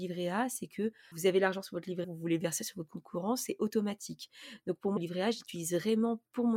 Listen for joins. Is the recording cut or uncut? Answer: cut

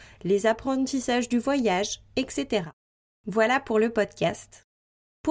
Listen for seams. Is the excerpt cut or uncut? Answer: uncut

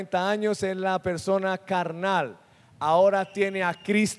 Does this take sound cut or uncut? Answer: uncut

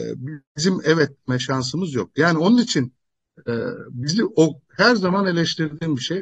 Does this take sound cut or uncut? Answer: uncut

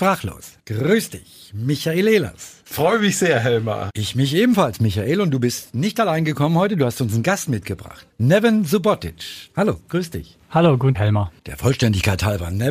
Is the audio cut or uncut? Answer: cut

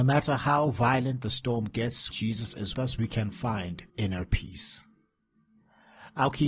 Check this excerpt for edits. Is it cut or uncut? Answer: cut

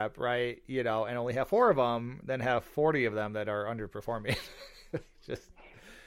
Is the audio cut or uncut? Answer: uncut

